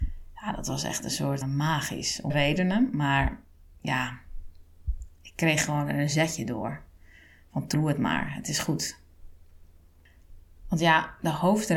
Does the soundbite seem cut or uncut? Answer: cut